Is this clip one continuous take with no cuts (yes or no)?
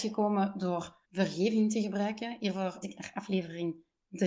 no